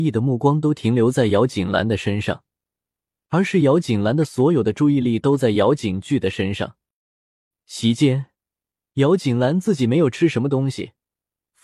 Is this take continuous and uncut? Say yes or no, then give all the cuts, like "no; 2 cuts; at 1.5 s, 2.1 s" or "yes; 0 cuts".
yes; 0 cuts